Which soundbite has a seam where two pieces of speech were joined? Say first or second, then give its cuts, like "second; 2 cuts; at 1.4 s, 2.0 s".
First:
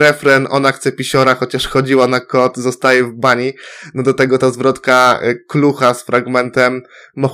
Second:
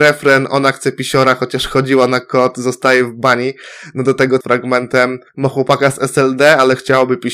second; 2 cuts; at 4.4 s, 5.3 s